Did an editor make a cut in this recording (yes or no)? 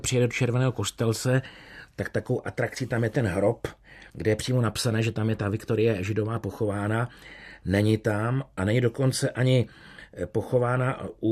yes